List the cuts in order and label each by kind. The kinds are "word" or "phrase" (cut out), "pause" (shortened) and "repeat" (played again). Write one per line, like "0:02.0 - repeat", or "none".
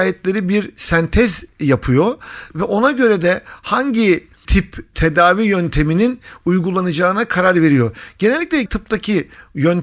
0:08.7 - word